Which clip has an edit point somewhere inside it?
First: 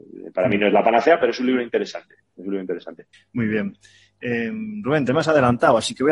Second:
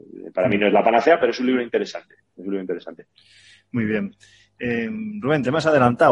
first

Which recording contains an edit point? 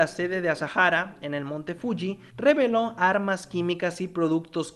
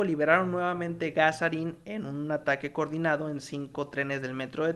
first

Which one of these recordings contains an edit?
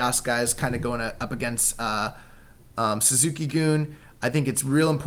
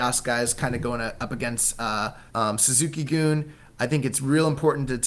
second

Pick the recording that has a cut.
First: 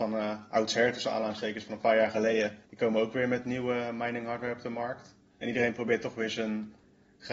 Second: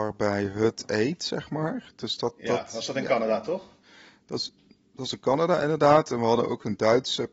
first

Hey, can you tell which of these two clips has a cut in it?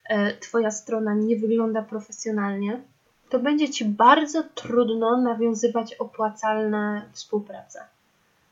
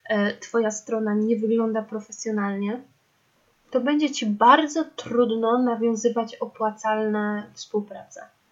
first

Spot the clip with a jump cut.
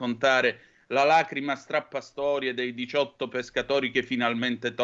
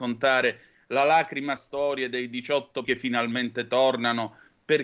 second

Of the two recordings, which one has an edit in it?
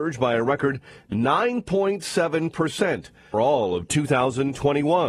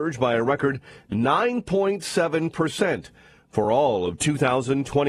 first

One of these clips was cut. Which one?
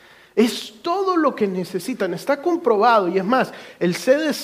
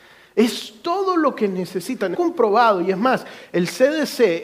second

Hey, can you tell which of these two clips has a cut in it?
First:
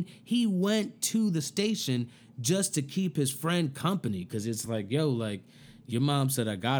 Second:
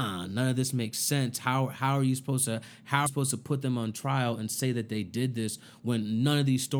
second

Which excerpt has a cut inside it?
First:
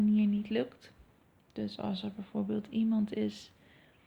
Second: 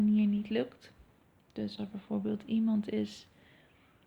second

